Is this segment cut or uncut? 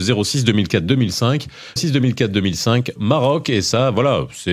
cut